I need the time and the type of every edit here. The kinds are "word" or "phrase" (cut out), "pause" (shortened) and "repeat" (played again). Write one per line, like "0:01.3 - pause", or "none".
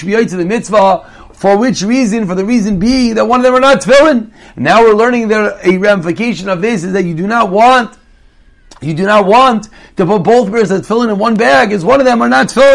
none